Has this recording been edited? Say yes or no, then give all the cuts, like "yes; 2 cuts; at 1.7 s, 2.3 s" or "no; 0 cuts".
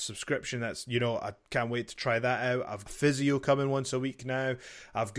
yes; 1 cut; at 2.9 s